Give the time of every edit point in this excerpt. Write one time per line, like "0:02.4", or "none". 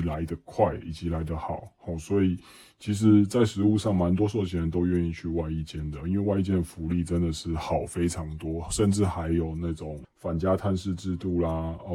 0:10.0